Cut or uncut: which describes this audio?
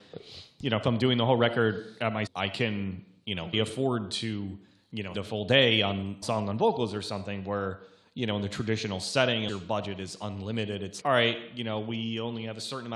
cut